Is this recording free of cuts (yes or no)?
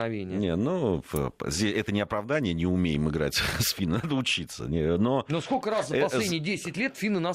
yes